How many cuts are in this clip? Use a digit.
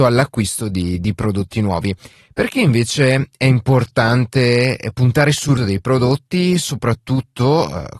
1